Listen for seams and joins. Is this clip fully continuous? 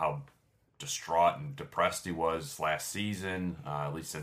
yes; 0 cuts

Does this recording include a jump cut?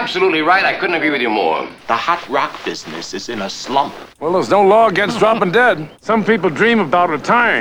yes; 2 cuts; at 4.1 s, 5.9 s

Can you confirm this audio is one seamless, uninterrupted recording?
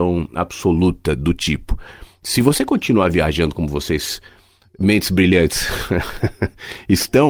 yes; 0 cuts

